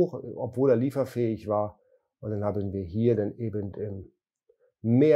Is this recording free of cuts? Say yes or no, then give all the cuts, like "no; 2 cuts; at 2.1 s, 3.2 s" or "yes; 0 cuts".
yes; 0 cuts